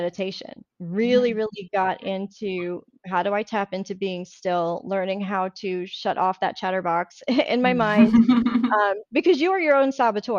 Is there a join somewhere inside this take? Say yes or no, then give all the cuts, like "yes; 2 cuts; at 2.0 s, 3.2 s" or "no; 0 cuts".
no; 0 cuts